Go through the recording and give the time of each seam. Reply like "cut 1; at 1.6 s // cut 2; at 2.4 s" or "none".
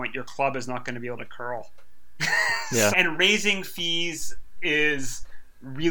cut 1; at 2.9 s